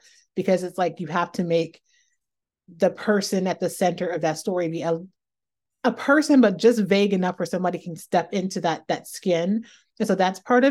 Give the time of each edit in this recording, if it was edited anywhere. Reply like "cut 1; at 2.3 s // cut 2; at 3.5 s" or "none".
none